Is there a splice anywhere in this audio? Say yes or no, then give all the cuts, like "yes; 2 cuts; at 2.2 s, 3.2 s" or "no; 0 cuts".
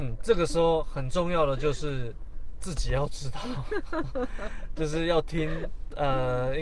no; 0 cuts